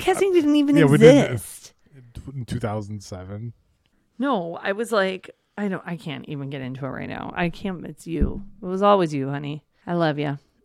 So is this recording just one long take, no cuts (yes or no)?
yes